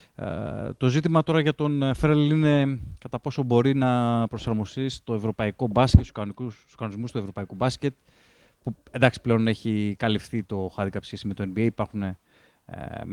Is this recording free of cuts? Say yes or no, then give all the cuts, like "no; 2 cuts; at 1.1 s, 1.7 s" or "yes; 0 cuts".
yes; 0 cuts